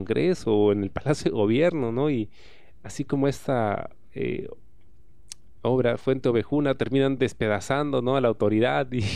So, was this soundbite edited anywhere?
no; 0 cuts

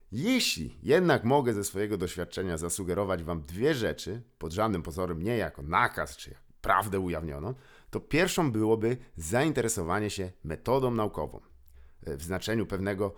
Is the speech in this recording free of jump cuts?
yes; 0 cuts

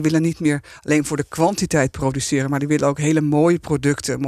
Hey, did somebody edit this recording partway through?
no; 0 cuts

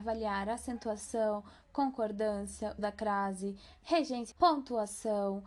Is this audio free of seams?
no; 2 cuts; at 2.8 s, 4.3 s

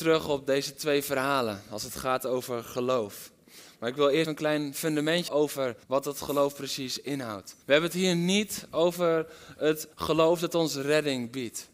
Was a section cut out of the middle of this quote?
yes; 5 cuts; at 4.2 s, 5.3 s, 5.8 s, 7.6 s, 9.9 s

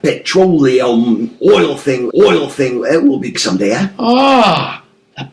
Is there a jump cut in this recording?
yes; 2 cuts; at 2.1 s, 3.3 s

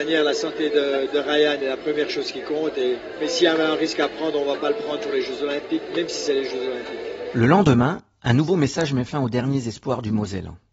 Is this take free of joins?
yes; 0 cuts

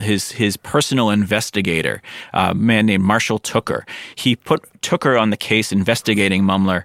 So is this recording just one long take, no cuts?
yes; 0 cuts

